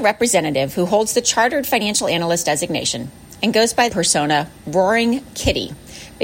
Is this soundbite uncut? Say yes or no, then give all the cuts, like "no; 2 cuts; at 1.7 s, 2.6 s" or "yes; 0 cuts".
no; 1 cut; at 3.9 s